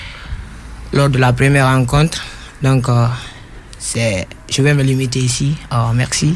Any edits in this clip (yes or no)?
no